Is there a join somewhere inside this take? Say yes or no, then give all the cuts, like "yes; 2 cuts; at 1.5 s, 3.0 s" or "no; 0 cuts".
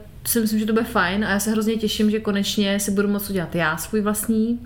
no; 0 cuts